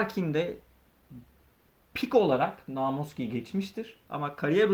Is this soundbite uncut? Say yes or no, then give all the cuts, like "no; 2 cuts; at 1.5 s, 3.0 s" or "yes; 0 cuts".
yes; 0 cuts